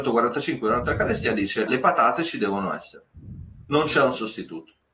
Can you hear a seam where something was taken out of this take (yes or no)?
yes